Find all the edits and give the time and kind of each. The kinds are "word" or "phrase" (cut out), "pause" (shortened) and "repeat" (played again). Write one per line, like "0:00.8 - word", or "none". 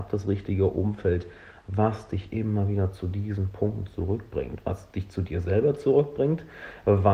none